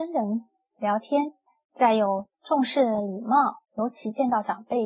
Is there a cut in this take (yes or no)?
yes